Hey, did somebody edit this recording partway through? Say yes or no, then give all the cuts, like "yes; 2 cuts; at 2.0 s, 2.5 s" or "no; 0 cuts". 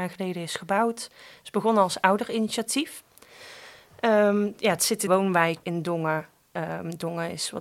yes; 2 cuts; at 5.1 s, 5.6 s